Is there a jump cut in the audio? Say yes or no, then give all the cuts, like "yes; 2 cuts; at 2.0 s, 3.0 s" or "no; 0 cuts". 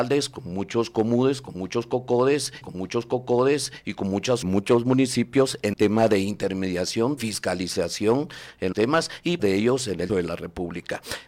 yes; 7 cuts; at 2.6 s, 4.4 s, 5.7 s, 7.2 s, 8.7 s, 9.4 s, 10.1 s